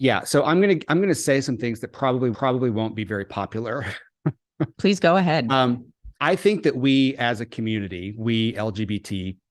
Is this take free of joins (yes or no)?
no